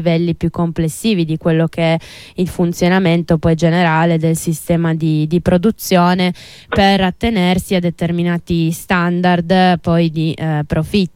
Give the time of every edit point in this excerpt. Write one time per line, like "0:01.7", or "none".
none